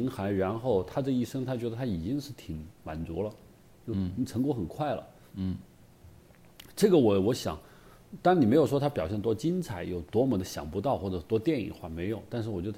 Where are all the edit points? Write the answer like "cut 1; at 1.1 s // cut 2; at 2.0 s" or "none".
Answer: none